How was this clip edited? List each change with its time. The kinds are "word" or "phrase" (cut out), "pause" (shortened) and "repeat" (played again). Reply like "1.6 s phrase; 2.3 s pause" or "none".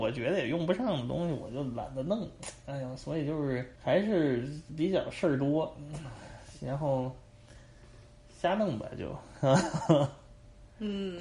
3.8 s pause